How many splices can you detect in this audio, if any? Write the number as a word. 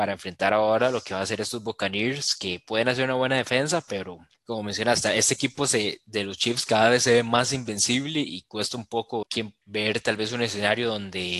two